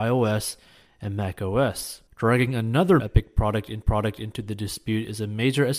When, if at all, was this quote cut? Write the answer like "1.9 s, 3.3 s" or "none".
2.1 s, 3.0 s, 3.8 s